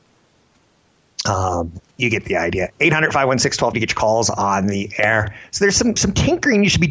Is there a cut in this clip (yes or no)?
yes